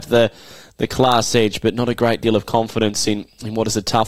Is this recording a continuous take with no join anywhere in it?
yes; 0 cuts

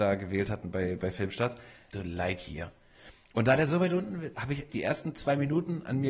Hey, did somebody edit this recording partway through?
yes; 3 cuts; at 1.9 s, 4.3 s, 4.7 s

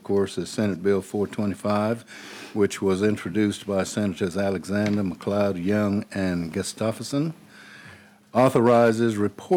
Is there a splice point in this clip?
no; 0 cuts

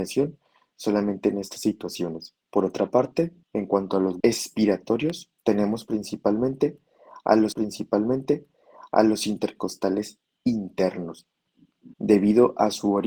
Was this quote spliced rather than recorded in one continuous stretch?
yes; 6 cuts; at 2.4 s, 3.4 s, 4.2 s, 5.4 s, 7.5 s, 11.9 s

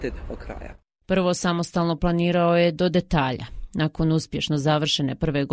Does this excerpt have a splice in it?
yes; 1 cut; at 2.0 s

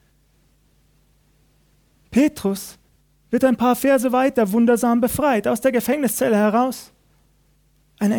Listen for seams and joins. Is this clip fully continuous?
yes; 0 cuts

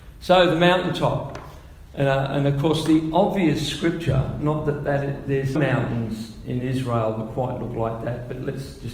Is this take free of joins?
no; 1 cut; at 5.5 s

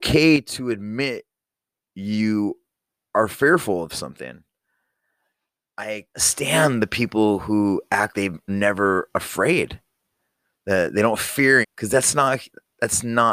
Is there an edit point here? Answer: yes; 4 cuts; at 6.1 s, 8.1 s, 8.5 s, 11.6 s

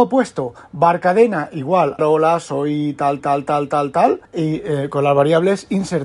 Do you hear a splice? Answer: yes; 3 cuts; at 2.0 s, 3.2 s, 4.3 s

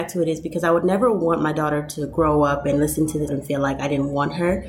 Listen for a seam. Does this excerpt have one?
yes; 1 cut; at 3.3 s

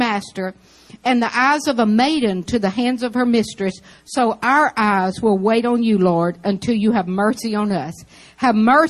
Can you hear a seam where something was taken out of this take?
no; 0 cuts

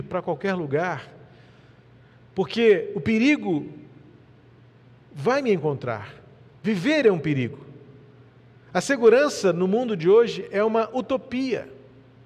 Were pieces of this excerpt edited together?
no; 0 cuts

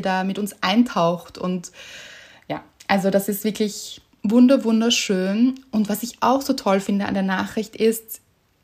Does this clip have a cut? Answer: no; 0 cuts

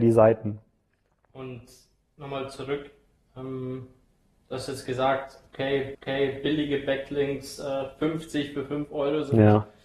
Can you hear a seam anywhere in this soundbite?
yes; 1 cut; at 5.9 s

